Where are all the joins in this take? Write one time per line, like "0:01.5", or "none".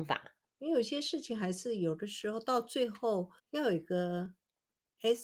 0:03.4